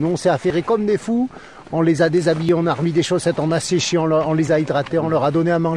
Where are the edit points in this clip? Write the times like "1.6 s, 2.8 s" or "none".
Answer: none